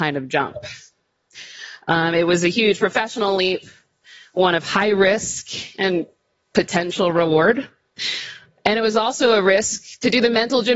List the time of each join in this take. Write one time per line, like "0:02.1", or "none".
none